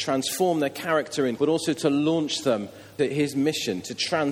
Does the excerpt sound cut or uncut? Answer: cut